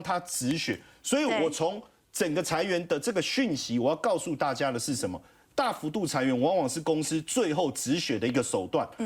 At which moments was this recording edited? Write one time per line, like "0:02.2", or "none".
none